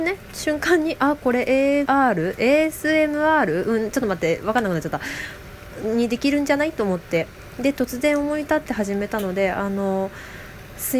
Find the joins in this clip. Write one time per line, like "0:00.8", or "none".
0:01.9

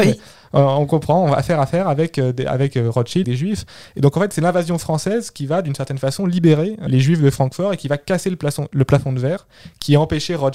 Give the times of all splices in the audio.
0:03.2
0:06.9

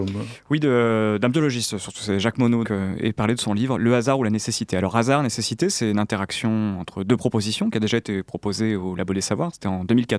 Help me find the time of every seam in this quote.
0:02.6

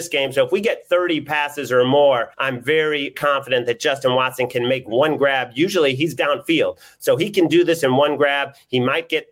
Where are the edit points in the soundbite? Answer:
0:02.3
0:03.1
0:06.2

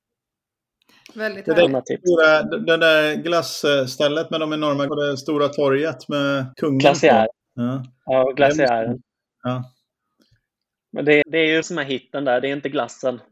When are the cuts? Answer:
0:04.9
0:06.5
0:07.4
0:11.2
0:11.6

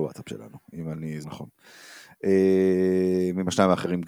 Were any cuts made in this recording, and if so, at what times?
0:01.2

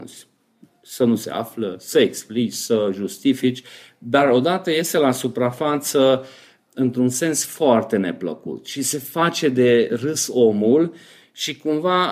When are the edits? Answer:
none

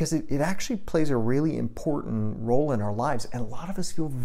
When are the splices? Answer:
none

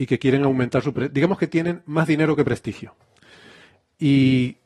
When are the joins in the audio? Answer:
none

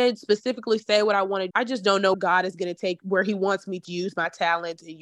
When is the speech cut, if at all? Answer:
0:01.5
0:02.1
0:03.0
0:03.8

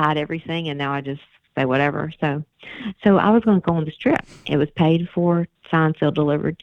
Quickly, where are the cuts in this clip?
none

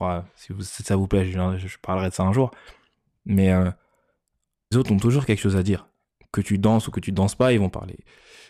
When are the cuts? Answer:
0:04.7

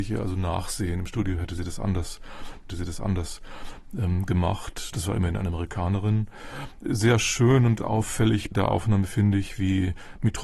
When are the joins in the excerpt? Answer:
0:02.7
0:08.5

